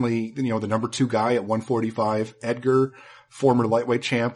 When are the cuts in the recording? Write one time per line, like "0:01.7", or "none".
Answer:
none